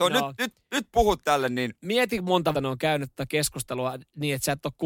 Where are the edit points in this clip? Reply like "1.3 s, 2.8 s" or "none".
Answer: 2.5 s